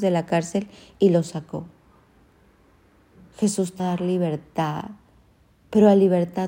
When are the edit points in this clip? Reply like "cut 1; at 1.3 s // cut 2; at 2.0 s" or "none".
cut 1; at 3.8 s